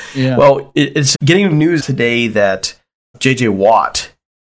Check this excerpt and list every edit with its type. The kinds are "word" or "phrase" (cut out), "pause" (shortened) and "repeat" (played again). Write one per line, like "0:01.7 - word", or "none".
0:01.1 - word
0:01.8 - word
0:03.1 - word